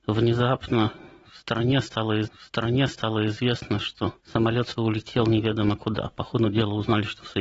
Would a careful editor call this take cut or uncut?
cut